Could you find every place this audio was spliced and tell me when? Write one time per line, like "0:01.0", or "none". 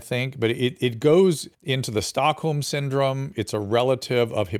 0:01.5